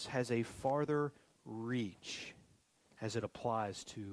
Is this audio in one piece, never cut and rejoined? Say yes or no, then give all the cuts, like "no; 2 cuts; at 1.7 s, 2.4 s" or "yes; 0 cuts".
yes; 0 cuts